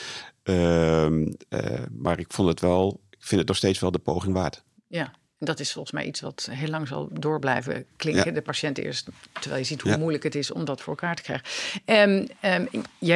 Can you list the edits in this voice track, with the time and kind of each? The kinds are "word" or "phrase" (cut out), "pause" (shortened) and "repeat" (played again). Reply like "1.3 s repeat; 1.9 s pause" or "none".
none